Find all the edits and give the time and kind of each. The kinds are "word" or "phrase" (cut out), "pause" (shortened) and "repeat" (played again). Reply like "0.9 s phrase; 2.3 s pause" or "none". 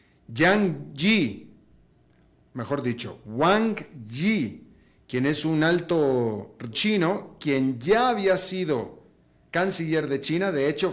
6.7 s word